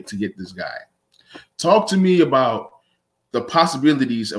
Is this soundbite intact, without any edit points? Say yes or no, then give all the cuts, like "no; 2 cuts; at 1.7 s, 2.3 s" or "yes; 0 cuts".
yes; 0 cuts